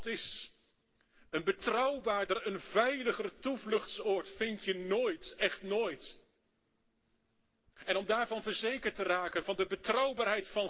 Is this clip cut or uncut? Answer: uncut